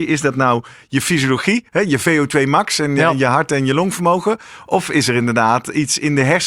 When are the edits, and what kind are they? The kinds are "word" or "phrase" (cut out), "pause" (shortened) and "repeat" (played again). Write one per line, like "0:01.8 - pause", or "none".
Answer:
0:01.7 - pause